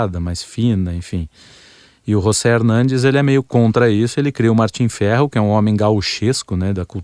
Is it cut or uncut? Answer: uncut